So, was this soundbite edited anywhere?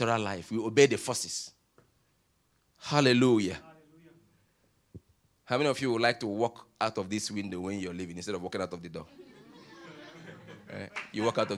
no; 0 cuts

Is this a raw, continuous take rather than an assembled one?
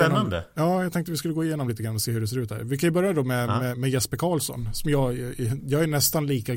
yes; 0 cuts

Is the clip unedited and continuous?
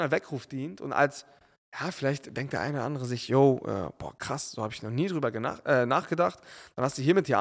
yes; 0 cuts

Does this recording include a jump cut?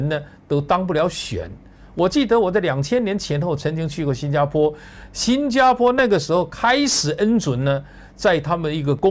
no; 0 cuts

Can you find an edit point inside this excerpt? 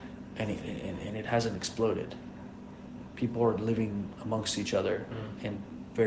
no; 0 cuts

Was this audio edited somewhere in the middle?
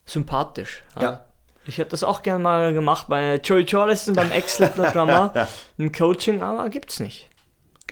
no; 0 cuts

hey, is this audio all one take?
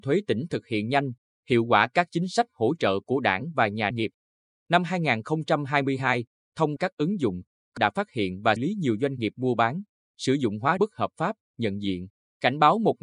no; 6 cuts; at 3.9 s, 6.8 s, 7.8 s, 8.6 s, 10.8 s, 11.5 s

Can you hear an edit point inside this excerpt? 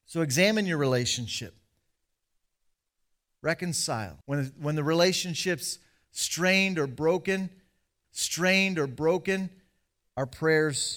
yes; 2 cuts; at 4.2 s, 8.0 s

